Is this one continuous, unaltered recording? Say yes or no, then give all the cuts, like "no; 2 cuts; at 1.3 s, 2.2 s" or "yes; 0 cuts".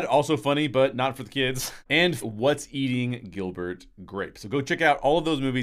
no; 1 cut; at 2.2 s